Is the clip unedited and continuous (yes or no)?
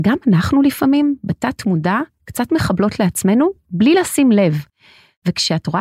yes